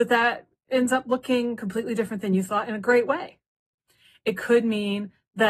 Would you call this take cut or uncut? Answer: uncut